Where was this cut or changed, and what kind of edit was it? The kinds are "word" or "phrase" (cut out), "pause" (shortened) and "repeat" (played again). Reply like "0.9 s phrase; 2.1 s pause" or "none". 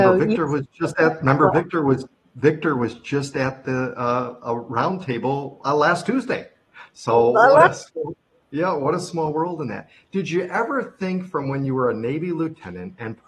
none